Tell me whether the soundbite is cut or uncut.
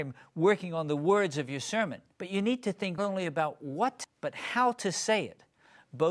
cut